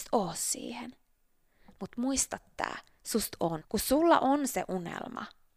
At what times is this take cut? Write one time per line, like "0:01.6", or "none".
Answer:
0:03.6